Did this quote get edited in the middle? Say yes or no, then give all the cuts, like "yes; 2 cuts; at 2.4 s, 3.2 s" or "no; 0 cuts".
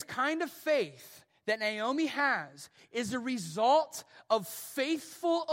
no; 0 cuts